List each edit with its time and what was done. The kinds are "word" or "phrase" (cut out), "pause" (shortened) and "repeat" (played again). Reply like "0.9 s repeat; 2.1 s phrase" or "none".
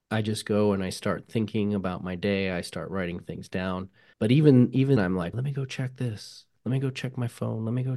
4.1 s word; 5.0 s word; 5.3 s word